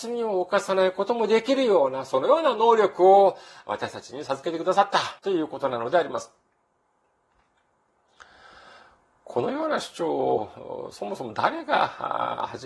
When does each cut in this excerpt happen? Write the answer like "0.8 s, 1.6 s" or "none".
5.2 s